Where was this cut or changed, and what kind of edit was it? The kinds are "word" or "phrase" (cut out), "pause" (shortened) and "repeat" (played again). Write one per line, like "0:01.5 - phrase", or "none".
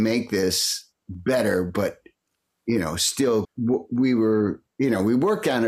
0:03.4 - phrase